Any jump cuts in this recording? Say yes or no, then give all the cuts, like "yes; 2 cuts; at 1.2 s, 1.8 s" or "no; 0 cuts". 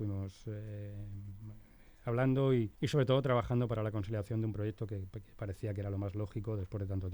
yes; 1 cut; at 2.7 s